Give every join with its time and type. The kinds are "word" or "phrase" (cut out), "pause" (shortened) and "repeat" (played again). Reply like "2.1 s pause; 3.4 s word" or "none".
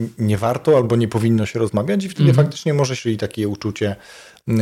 3.0 s phrase